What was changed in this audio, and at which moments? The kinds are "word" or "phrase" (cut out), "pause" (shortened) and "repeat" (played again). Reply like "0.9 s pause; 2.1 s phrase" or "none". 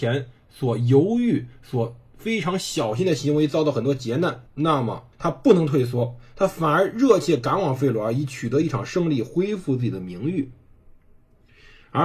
4.5 s pause; 5.1 s pause